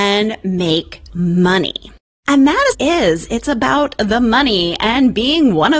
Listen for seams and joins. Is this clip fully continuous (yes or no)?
no